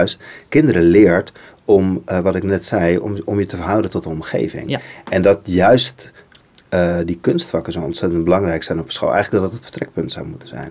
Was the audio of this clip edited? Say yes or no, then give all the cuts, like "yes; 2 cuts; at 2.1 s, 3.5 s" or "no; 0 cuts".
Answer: no; 0 cuts